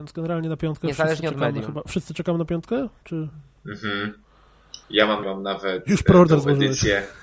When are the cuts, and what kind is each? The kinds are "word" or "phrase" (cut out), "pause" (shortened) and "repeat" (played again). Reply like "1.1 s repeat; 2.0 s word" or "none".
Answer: 4.8 s pause; 5.2 s phrase